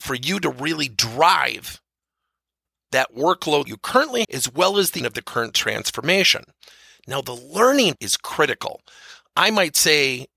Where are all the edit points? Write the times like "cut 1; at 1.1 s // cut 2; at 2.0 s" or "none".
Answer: cut 1; at 3.7 s // cut 2; at 4.2 s // cut 3; at 5.0 s // cut 4; at 8.0 s

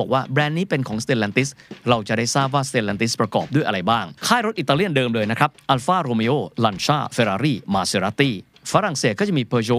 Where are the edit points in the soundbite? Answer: cut 1; at 4.2 s

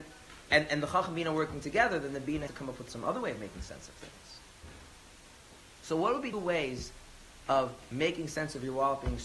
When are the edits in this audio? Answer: cut 1; at 2.5 s // cut 2; at 6.3 s

